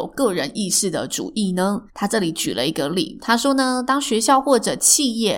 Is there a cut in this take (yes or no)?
yes